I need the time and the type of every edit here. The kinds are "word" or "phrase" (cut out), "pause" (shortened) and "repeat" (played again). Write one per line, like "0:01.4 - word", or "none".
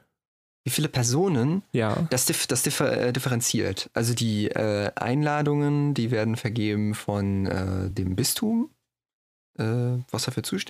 none